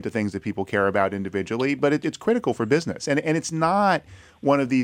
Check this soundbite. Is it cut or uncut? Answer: uncut